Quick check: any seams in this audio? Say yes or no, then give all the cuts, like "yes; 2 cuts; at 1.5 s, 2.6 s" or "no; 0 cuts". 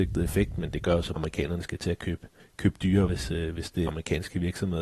yes; 4 cuts; at 1.2 s, 2.4 s, 3.1 s, 3.9 s